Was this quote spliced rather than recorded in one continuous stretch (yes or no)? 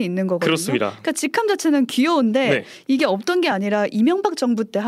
no